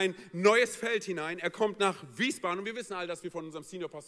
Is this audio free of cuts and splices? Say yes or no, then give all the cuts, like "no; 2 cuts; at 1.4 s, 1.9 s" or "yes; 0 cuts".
yes; 0 cuts